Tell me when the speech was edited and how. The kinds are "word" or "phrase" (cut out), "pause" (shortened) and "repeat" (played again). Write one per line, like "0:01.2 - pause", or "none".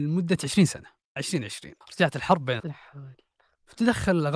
0:01.2 - word
0:01.8 - pause
0:02.6 - word